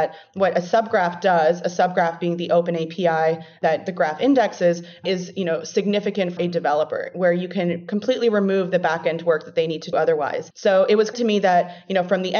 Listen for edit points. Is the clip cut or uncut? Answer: cut